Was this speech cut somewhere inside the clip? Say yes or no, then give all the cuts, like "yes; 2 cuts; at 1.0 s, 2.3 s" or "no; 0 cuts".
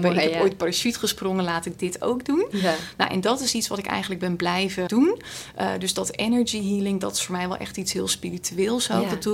yes; 1 cut; at 4.9 s